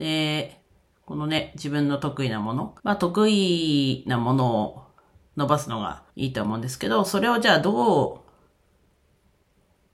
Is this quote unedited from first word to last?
no; 2 cuts; at 2.8 s, 6.1 s

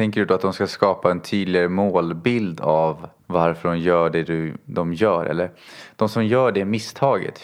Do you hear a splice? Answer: yes; 1 cut; at 3.2 s

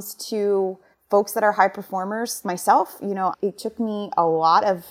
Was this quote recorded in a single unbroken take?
no; 3 cuts; at 0.9 s, 2.4 s, 3.3 s

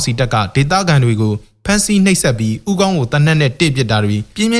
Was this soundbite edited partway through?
no; 0 cuts

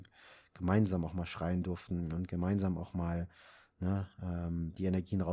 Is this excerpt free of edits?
yes; 0 cuts

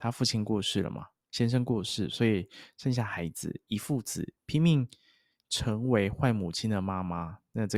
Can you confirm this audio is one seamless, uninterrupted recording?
yes; 0 cuts

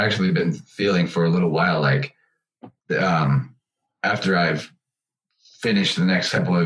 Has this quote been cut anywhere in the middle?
no; 0 cuts

